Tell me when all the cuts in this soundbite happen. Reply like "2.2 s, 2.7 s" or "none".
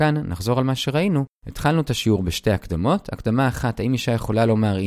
1.4 s

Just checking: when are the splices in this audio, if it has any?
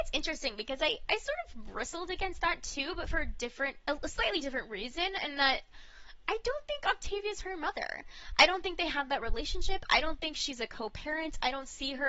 1.1 s

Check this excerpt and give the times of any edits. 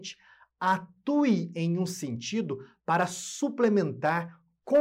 none

